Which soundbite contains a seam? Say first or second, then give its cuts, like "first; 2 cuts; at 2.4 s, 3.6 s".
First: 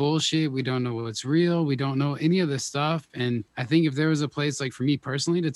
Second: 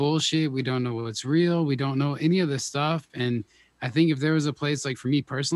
first; 1 cut; at 3.5 s